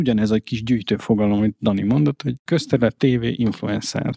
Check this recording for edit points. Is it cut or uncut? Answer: uncut